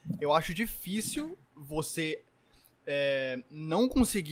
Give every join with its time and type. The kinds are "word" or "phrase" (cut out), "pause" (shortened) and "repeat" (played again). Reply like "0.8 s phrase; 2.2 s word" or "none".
1.4 s pause

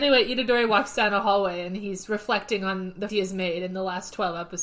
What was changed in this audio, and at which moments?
3.1 s word

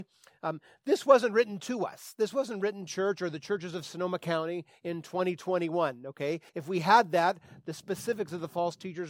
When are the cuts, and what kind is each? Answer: 2.9 s phrase; 6.5 s word

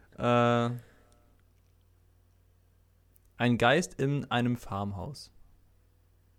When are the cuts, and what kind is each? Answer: none

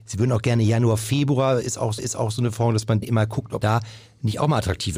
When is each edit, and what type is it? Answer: 2.0 s repeat; 3.0 s word; 3.6 s word

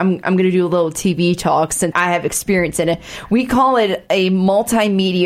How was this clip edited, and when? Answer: 1.9 s word

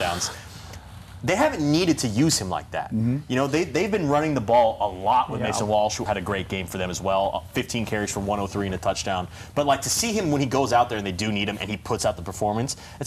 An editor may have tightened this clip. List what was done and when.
6.1 s word

